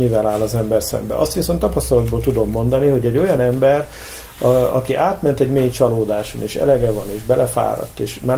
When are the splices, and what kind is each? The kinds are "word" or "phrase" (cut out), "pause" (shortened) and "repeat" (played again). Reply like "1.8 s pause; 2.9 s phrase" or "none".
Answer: none